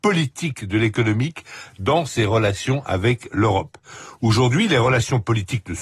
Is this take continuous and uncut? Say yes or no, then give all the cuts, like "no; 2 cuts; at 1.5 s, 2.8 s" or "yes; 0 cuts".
yes; 0 cuts